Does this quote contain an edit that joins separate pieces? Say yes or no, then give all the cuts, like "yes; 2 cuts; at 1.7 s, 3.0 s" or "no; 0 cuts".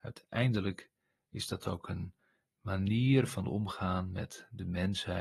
no; 0 cuts